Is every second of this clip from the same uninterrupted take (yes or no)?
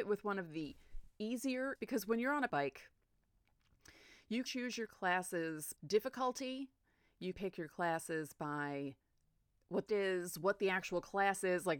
no